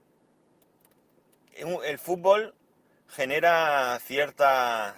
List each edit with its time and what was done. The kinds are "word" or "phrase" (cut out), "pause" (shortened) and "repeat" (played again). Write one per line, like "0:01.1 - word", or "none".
none